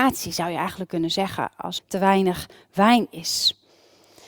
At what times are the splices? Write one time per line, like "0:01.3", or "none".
0:01.8